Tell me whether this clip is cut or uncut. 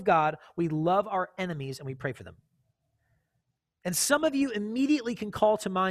uncut